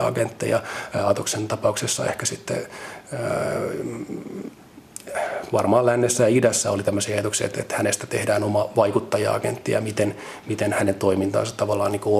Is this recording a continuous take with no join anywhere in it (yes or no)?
yes